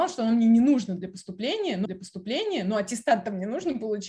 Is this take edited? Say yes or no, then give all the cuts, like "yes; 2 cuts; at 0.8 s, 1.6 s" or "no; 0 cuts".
yes; 1 cut; at 1.8 s